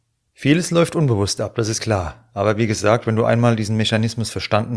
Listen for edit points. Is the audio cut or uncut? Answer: cut